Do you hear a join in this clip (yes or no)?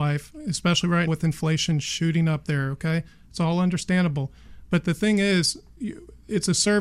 yes